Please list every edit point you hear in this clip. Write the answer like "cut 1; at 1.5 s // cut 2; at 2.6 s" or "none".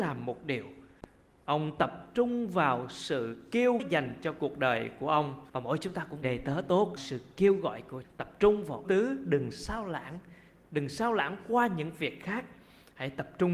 cut 1; at 3.8 s // cut 2; at 5.5 s // cut 3; at 6.2 s // cut 4; at 7.0 s // cut 5; at 8.0 s // cut 6; at 8.8 s